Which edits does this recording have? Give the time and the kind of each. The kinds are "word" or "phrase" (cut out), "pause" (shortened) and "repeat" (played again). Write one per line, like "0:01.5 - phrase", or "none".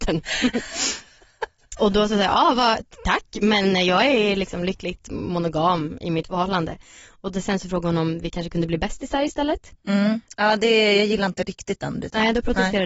0:01.8 - word

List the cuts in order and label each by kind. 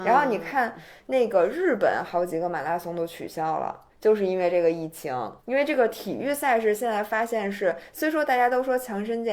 0:03.9 - pause
0:05.4 - pause

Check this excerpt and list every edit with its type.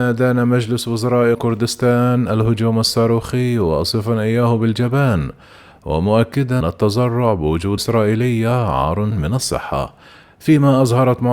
0:01.3 - word
0:06.6 - word
0:07.8 - word
0:09.1 - word

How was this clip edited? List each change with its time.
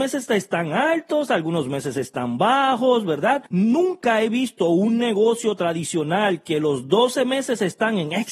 0:03.5 - pause

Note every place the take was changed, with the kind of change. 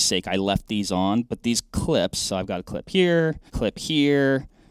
0:03.5 - pause

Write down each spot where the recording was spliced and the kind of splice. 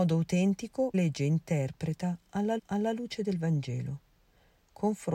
0:00.9 - word
0:02.6 - repeat

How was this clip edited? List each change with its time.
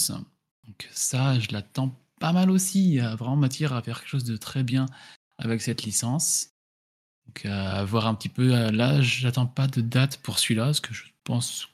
none

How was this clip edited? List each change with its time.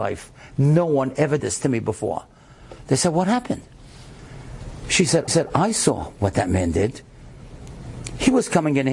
0:01.4 - word
0:05.3 - repeat

